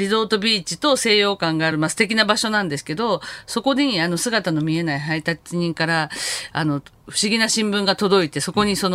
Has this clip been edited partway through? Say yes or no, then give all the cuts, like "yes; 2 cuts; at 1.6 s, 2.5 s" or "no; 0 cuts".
no; 0 cuts